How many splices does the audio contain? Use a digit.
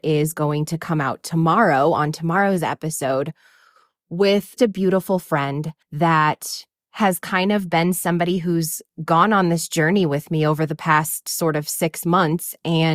2